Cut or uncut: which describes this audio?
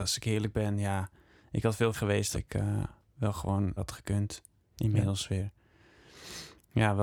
cut